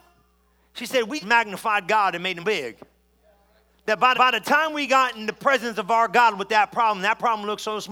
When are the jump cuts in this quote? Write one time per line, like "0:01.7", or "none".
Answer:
0:01.2
0:02.4
0:04.1